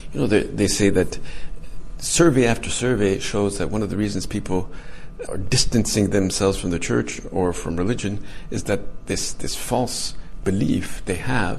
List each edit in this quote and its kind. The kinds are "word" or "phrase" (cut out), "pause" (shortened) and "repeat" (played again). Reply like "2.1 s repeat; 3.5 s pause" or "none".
5.3 s word